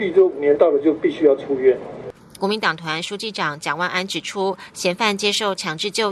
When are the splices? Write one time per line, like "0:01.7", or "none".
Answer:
0:02.2